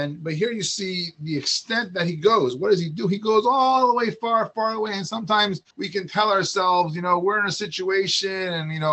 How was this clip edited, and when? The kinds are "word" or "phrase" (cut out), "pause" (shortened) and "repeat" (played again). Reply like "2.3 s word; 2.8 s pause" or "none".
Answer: 5.7 s pause